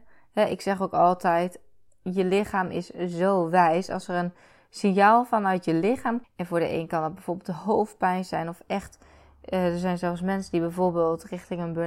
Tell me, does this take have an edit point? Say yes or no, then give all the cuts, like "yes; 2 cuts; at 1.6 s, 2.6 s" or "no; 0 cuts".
yes; 1 cut; at 6.2 s